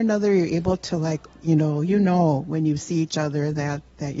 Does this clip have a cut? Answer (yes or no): no